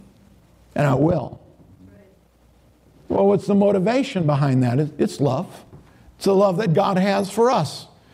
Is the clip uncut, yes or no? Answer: yes